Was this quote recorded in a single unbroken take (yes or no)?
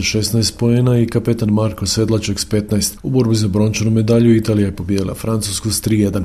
yes